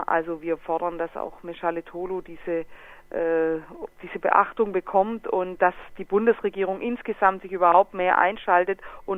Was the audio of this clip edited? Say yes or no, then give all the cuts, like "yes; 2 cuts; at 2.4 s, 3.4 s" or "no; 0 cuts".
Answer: no; 0 cuts